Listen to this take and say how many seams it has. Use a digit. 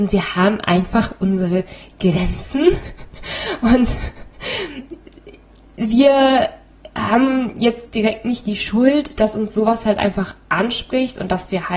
0